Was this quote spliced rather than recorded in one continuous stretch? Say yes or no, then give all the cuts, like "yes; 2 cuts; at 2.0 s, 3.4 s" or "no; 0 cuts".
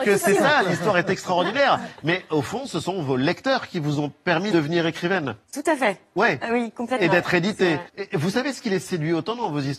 yes; 3 cuts; at 4.5 s, 5.4 s, 7.9 s